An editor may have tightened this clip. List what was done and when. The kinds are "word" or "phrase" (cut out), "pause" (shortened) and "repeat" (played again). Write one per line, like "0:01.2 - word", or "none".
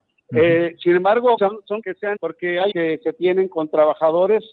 0:01.4 - word
0:01.8 - word
0:02.2 - word
0:02.7 - word